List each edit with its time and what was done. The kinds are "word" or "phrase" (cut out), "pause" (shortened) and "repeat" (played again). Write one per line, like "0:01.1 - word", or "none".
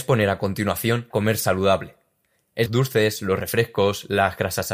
0:01.1 - word
0:02.7 - phrase